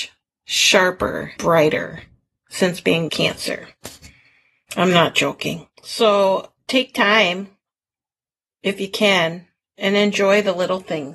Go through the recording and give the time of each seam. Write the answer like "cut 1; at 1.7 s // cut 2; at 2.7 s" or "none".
cut 1; at 1.4 s // cut 2; at 3.1 s // cut 3; at 5.7 s